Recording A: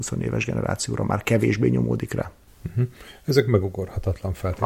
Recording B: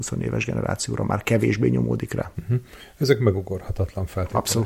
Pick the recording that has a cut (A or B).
B